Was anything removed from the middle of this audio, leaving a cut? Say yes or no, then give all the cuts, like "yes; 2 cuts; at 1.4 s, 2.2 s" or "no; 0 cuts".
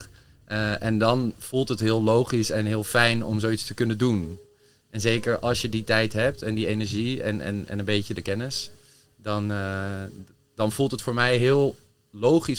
no; 0 cuts